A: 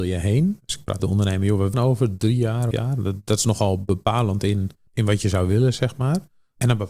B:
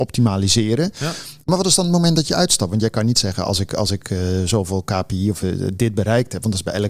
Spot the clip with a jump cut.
A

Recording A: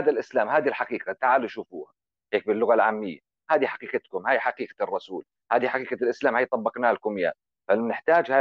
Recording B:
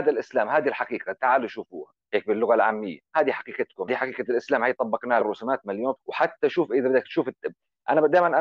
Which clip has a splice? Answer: B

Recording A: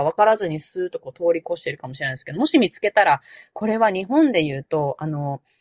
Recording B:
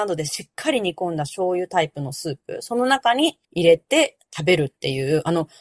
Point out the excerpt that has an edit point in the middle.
B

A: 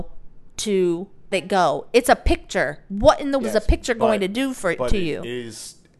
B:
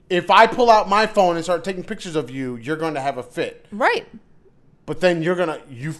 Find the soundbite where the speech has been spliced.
A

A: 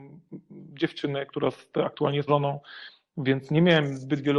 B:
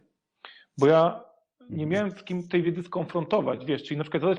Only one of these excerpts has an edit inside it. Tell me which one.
A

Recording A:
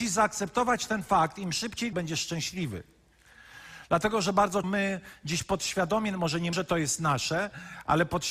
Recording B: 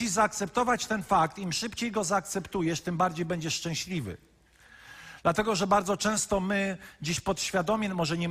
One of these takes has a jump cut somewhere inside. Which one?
A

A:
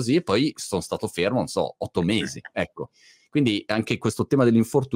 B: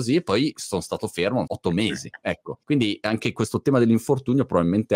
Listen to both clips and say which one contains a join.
B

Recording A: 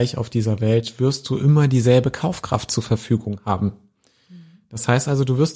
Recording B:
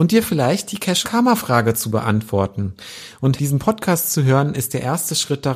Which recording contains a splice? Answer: B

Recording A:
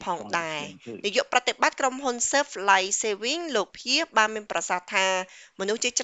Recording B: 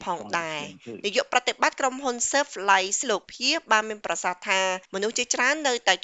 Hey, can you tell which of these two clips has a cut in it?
B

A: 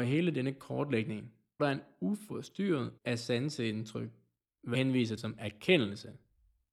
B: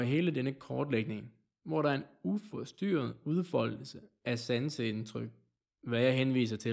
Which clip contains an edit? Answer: A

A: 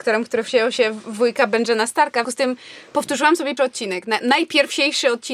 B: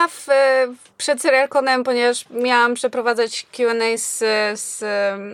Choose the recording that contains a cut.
A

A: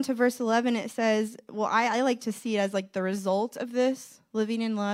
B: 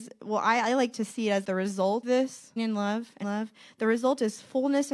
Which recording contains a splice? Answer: B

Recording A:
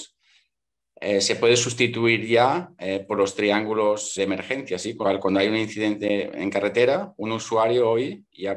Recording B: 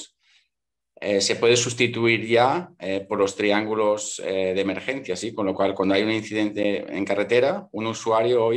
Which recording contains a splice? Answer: A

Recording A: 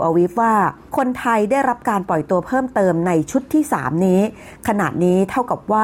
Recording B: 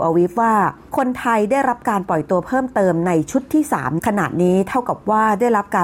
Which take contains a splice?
B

